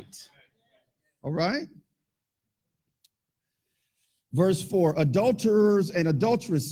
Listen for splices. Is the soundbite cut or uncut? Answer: uncut